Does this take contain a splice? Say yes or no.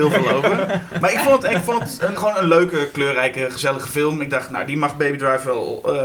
yes